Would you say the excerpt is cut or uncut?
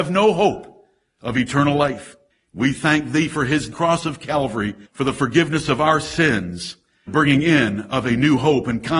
cut